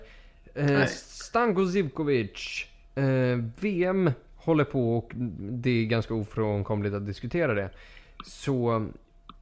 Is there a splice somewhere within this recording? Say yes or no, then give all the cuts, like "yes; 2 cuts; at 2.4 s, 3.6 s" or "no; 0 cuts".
no; 0 cuts